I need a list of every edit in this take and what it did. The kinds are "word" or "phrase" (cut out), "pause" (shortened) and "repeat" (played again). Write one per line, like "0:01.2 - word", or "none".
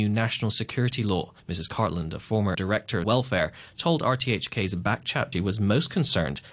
0:01.4 - pause
0:02.5 - word
0:03.0 - word
0:05.3 - phrase

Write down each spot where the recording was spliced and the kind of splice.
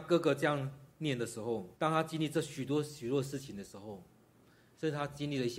0:01.7 - pause

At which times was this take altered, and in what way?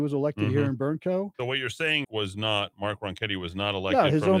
0:01.3 - pause
0:02.0 - phrase

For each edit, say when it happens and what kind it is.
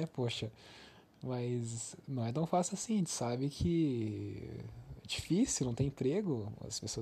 none

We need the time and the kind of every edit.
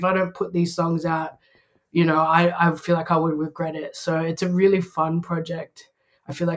none

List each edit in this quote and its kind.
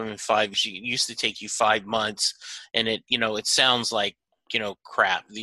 none

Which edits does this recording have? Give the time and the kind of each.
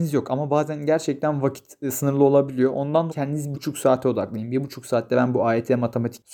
0:03.1 - word
0:03.5 - word

